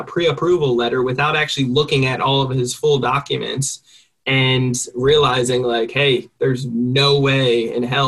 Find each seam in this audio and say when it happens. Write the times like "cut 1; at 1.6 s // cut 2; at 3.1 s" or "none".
none